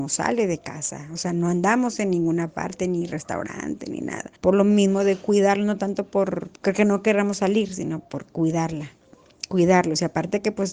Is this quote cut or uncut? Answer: cut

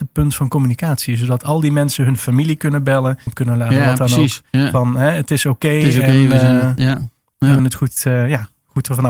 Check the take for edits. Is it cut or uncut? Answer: cut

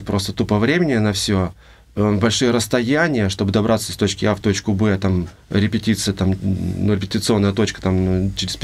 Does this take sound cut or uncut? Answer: uncut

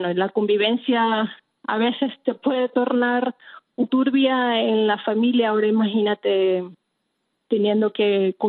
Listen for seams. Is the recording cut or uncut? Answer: cut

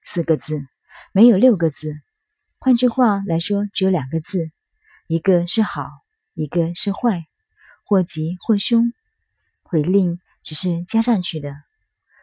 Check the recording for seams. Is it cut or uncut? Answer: uncut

